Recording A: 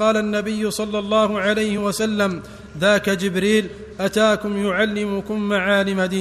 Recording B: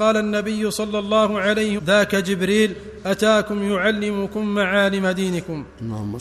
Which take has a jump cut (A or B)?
B